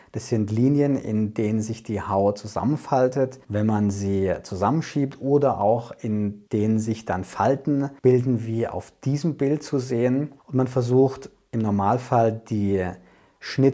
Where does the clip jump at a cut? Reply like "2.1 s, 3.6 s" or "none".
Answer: 3.4 s, 6.5 s, 8.0 s, 10.4 s

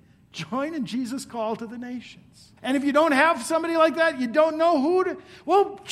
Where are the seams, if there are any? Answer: 2.6 s

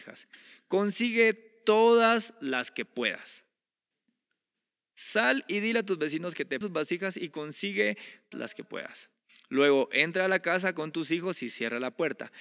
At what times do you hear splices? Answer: 6.6 s, 8.3 s

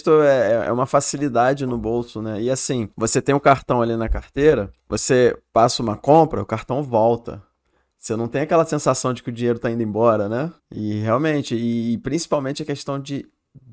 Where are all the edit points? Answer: 2.9 s, 4.8 s, 10.6 s

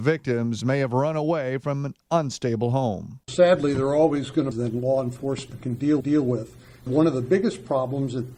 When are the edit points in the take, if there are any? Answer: 4.5 s, 6.0 s

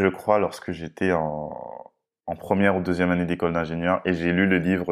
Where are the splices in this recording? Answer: none

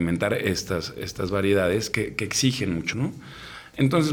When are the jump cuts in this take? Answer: 1.9 s, 2.9 s

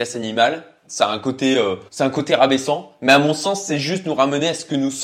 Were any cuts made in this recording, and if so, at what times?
1.9 s

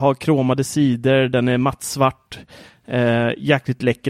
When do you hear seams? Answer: none

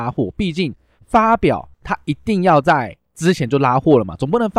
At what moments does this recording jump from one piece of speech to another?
1.7 s

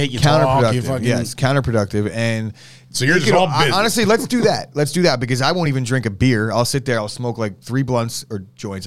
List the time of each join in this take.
none

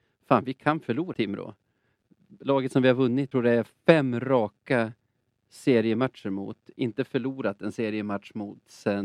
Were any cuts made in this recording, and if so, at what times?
1.1 s, 3.3 s

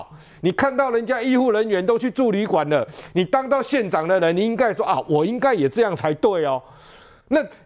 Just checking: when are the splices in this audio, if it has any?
none

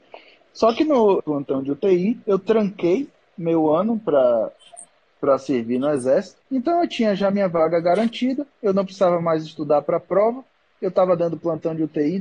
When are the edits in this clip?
1.2 s, 2.2 s, 6.5 s, 8.5 s

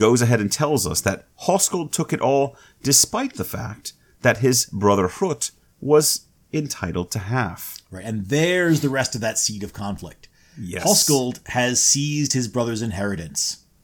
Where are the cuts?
none

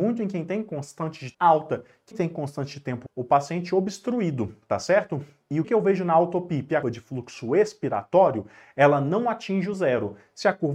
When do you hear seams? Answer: 1.3 s, 2.1 s, 3.1 s, 5.6 s, 6.8 s

